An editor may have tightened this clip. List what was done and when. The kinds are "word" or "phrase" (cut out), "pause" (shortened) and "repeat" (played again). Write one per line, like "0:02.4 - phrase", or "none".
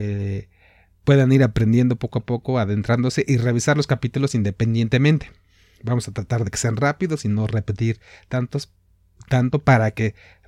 none